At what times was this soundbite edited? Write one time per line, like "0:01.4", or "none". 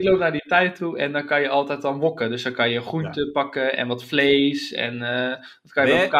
none